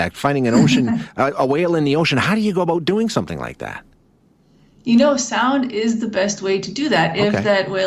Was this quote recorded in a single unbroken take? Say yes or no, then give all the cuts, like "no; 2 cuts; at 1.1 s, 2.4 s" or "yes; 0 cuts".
yes; 0 cuts